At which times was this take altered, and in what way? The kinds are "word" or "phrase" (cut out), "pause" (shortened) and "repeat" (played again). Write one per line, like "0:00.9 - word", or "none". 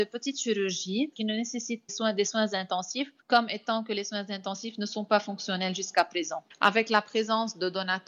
0:01.9 - phrase
0:03.2 - pause